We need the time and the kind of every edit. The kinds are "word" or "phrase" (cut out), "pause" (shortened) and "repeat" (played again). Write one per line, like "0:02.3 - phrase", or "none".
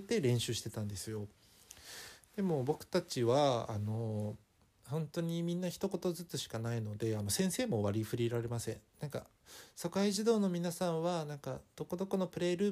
0:04.6 - pause
0:08.9 - pause